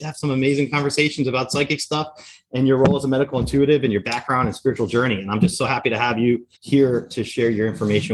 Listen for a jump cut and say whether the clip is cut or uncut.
cut